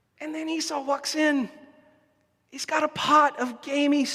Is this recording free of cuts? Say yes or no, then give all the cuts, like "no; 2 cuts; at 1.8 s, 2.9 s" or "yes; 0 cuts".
yes; 0 cuts